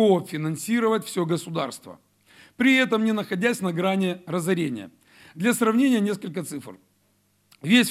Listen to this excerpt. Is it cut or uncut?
uncut